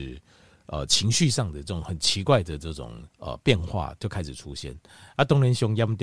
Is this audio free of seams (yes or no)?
no